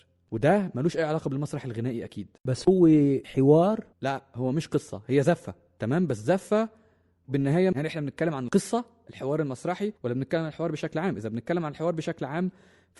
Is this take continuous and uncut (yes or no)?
no